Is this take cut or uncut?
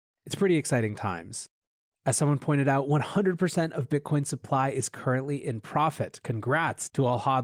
uncut